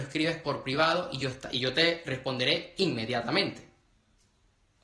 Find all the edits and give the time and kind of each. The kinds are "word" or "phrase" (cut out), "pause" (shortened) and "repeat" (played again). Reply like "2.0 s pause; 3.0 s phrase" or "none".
none